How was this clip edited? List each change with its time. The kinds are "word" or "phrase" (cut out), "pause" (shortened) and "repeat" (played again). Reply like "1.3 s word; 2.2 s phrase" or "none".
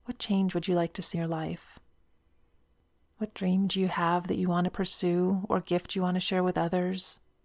1.1 s word